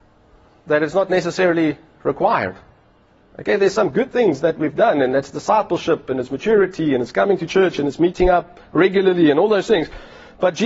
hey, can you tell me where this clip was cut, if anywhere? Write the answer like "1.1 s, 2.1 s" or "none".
none